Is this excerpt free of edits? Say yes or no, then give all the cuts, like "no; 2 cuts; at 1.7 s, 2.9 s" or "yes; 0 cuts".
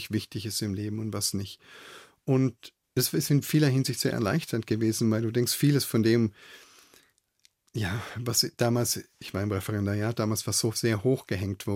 yes; 0 cuts